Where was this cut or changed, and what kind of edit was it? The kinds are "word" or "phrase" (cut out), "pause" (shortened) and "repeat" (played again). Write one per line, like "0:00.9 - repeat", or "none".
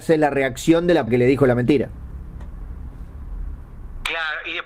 0:01.1 - word